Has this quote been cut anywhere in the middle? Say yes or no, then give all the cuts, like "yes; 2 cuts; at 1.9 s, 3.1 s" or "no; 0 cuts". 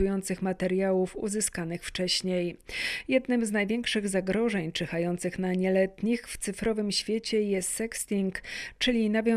no; 0 cuts